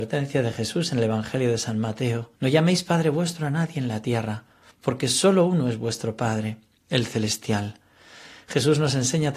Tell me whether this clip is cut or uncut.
cut